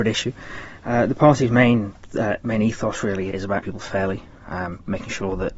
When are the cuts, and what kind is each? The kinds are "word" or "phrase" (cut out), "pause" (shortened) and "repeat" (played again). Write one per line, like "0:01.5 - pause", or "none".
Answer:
0:03.3 - word
0:03.6 - word